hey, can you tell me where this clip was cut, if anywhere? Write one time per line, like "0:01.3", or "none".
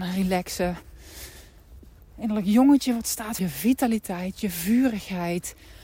0:03.4